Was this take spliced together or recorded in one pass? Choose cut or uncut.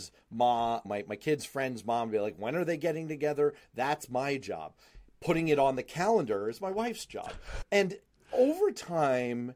uncut